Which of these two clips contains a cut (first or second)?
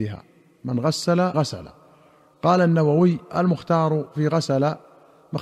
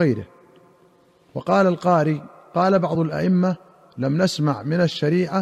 first